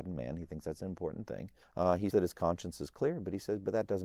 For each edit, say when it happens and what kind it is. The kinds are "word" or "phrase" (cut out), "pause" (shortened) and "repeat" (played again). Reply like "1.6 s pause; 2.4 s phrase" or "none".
1.6 s pause; 2.1 s word